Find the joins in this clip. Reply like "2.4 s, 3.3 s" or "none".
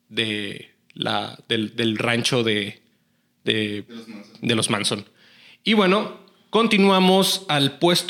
none